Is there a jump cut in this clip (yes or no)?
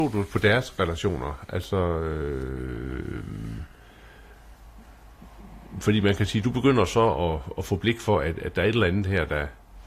no